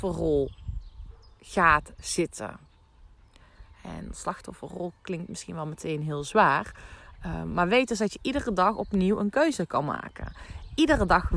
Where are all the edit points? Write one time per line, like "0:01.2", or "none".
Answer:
none